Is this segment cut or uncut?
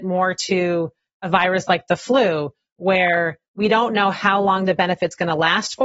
uncut